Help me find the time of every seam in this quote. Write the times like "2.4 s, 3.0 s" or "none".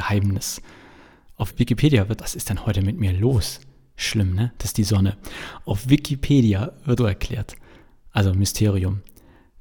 1.5 s, 2.2 s, 7.0 s

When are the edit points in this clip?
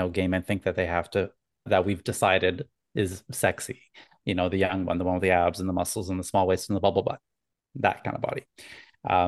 1.7 s

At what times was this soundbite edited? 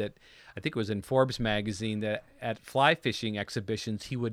none

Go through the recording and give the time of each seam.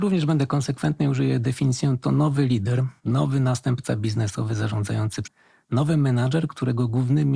3.0 s, 5.2 s

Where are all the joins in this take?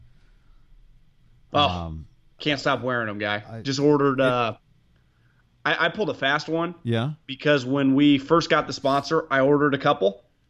none

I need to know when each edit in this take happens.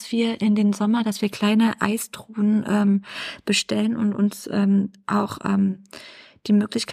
none

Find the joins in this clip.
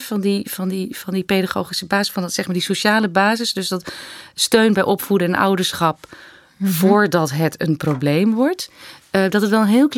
none

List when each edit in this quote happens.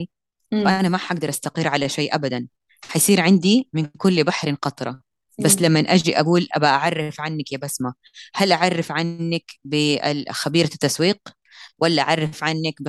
none

